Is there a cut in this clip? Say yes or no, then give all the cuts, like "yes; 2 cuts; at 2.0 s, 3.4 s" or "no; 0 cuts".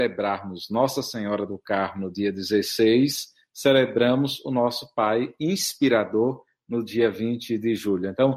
no; 0 cuts